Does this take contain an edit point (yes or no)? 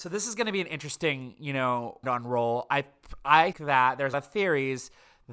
yes